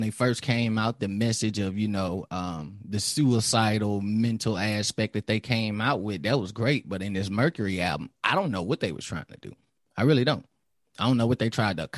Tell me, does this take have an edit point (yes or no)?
no